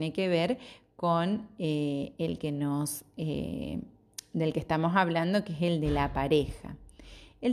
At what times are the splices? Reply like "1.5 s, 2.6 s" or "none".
none